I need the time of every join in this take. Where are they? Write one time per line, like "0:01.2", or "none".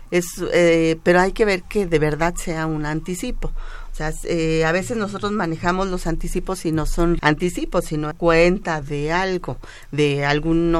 0:07.2
0:08.1
0:08.8